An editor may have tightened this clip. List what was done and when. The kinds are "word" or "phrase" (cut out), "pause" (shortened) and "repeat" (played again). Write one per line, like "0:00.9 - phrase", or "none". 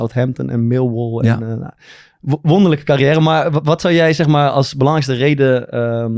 none